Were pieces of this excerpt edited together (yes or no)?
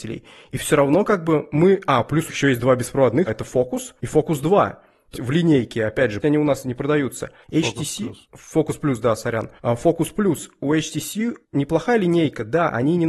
yes